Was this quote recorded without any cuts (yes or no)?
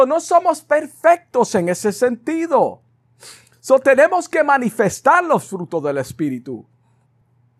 yes